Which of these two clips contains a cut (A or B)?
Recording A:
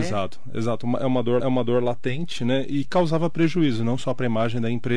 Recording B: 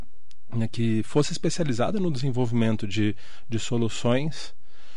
A